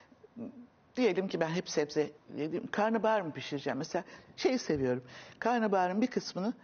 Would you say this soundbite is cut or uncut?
cut